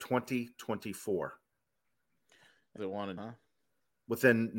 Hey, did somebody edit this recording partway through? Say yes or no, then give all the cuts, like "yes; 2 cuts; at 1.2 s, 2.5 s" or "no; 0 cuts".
yes; 2 cuts; at 2.8 s, 3.2 s